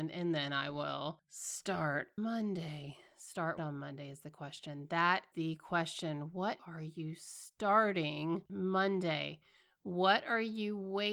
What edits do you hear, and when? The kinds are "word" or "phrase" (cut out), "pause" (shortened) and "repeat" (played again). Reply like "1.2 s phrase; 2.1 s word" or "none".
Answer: 2.2 s word; 3.6 s word; 5.3 s word; 6.6 s word; 8.5 s word